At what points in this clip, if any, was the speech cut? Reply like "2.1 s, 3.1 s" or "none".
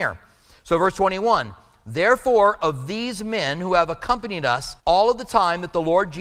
4.8 s